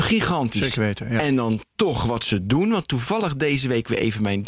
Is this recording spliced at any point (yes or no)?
no